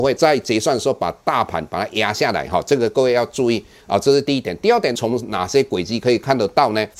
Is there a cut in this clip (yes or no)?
no